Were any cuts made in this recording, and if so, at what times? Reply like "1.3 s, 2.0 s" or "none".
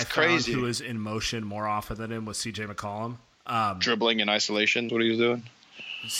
3.3 s, 4.9 s

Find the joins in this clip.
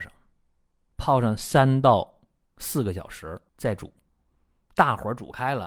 3.5 s

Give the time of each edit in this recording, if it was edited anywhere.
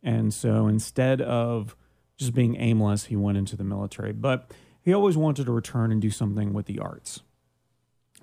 none

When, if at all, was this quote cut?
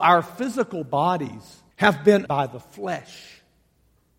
1.7 s, 2.3 s

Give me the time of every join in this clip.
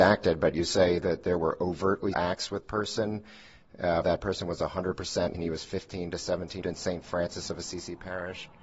2.1 s, 2.6 s, 4.0 s, 5.3 s, 6.6 s

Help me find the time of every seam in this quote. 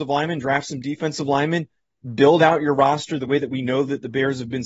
none

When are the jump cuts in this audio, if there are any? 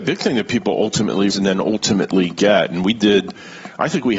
1.3 s

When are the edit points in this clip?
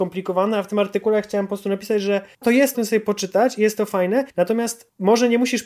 2.4 s, 2.7 s, 4.3 s

